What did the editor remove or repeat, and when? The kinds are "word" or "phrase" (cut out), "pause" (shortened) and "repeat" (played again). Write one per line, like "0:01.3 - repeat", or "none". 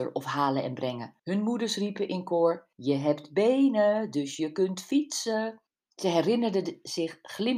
0:01.2 - pause
0:02.7 - pause
0:05.7 - pause